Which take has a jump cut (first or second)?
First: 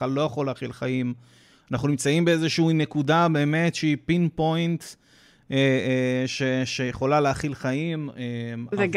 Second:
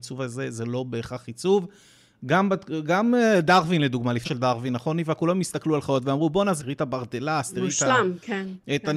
second